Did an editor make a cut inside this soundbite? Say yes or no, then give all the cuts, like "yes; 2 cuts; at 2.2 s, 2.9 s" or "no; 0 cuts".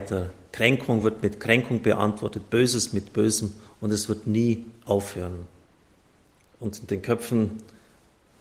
no; 0 cuts